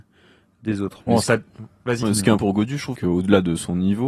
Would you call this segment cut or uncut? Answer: cut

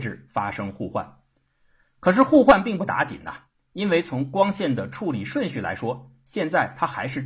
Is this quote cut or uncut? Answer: uncut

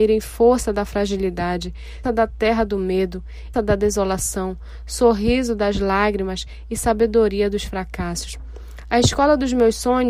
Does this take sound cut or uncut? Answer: cut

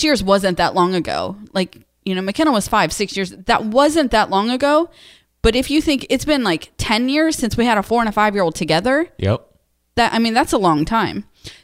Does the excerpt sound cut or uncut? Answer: uncut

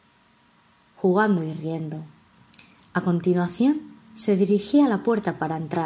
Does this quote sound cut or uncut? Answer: cut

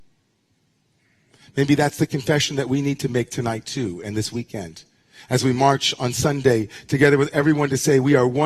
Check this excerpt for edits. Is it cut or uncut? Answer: uncut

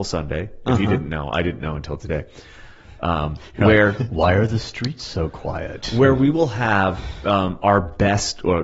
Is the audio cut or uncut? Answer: uncut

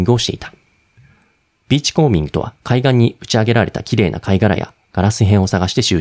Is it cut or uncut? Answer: cut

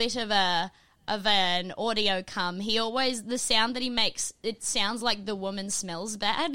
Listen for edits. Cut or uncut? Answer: uncut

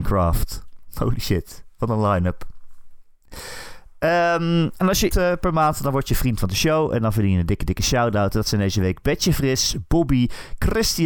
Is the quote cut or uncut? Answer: cut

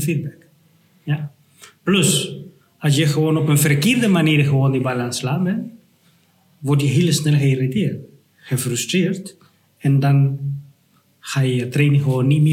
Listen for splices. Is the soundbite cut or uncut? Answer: uncut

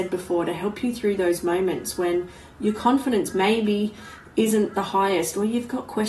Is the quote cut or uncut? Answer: uncut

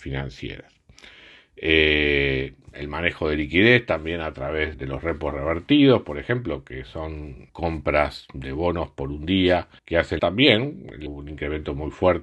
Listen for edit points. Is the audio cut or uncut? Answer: cut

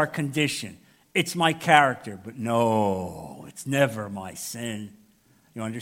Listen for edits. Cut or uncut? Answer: uncut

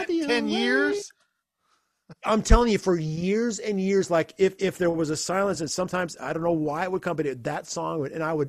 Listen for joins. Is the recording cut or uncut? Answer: uncut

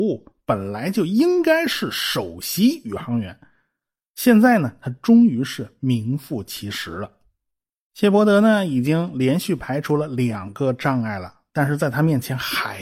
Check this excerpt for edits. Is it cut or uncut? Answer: uncut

